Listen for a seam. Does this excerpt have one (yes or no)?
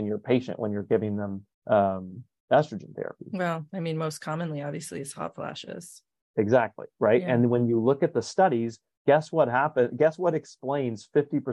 yes